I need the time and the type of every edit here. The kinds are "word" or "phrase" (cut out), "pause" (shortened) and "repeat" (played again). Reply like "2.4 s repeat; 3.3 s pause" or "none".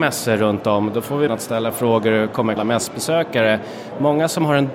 1.3 s word; 2.6 s phrase